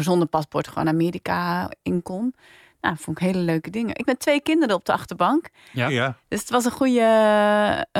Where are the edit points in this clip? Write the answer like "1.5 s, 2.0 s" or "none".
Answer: 4.0 s